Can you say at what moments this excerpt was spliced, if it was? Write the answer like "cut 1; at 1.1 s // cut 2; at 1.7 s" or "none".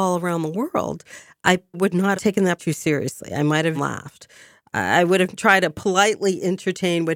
cut 1; at 1.7 s // cut 2; at 2.1 s // cut 3; at 2.6 s // cut 4; at 3.7 s // cut 5; at 5.3 s